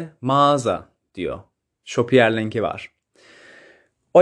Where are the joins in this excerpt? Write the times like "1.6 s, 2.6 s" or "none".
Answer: none